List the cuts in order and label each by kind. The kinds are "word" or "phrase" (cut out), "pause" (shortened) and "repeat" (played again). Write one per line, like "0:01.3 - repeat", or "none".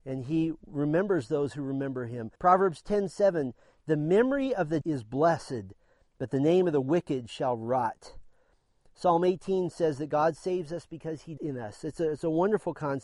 0:02.4 - pause
0:04.8 - word
0:11.4 - word